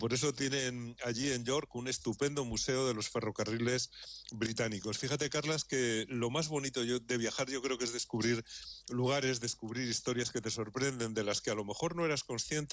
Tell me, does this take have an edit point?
no; 0 cuts

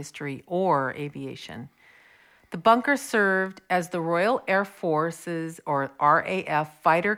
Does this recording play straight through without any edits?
yes; 0 cuts

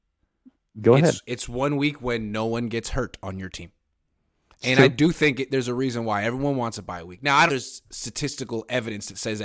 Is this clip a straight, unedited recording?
no; 1 cut; at 7.5 s

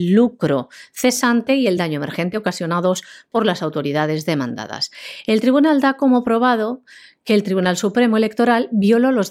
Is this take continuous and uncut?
yes; 0 cuts

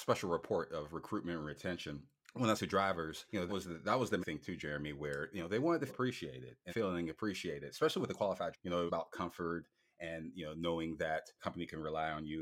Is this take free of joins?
no; 8 cuts; at 2.6 s, 3.5 s, 4.2 s, 5.9 s, 6.7 s, 8.5 s, 8.9 s, 11.4 s

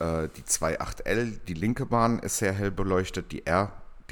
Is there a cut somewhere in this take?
no; 0 cuts

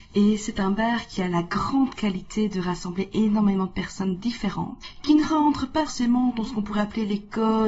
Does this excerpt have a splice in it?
yes; 1 cut; at 5.9 s

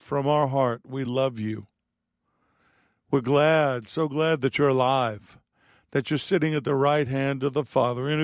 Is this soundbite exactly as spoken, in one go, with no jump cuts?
yes; 0 cuts

